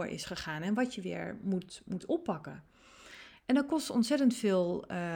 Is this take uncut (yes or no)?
yes